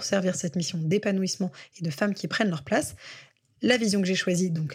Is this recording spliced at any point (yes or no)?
no